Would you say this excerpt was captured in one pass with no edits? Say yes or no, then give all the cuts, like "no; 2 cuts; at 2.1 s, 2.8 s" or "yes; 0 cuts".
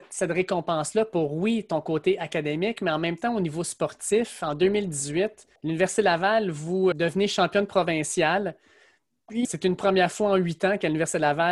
no; 3 cuts; at 5.6 s, 6.9 s, 9.4 s